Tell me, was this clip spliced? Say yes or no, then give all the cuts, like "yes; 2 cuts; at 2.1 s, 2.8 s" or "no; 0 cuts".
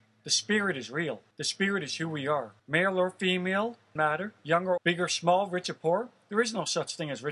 yes; 4 cuts; at 1.3 s, 2.6 s, 4.0 s, 4.8 s